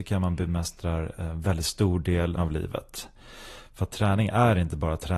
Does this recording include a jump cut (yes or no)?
yes